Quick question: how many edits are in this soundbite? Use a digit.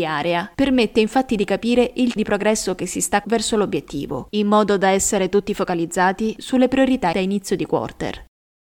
3